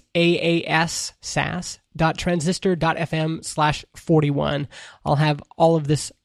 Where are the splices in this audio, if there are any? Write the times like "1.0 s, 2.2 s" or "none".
none

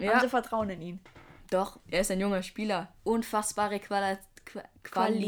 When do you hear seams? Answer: 1.8 s

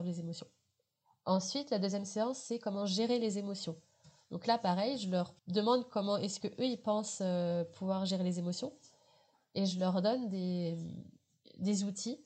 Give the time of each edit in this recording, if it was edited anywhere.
5.4 s

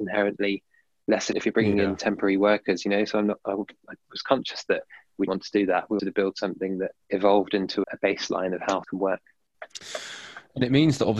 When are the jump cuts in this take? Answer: 1.3 s, 5.3 s, 6.0 s, 7.0 s, 7.8 s, 8.8 s

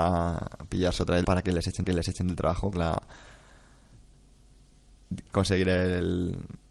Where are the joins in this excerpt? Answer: 1.2 s, 1.8 s, 2.7 s, 5.3 s

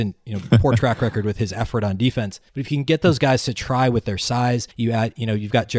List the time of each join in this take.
2.5 s, 4.7 s

